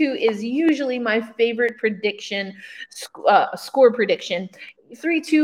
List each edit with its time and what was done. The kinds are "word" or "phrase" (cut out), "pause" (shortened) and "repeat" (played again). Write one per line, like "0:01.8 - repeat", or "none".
none

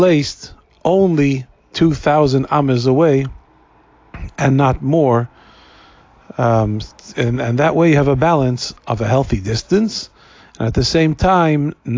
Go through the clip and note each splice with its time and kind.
none

